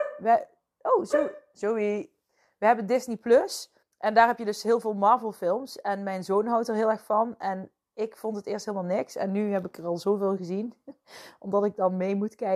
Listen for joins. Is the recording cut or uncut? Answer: cut